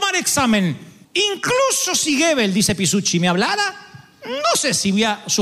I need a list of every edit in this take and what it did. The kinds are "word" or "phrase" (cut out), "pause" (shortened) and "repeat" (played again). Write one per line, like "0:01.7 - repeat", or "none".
0:01.0 - pause